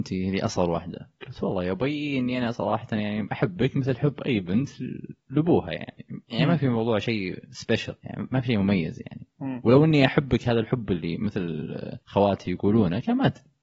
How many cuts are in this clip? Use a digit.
4